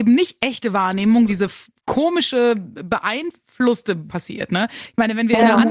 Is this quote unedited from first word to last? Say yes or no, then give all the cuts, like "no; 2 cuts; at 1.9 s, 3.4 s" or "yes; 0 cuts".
no; 2 cuts; at 1.3 s, 4.1 s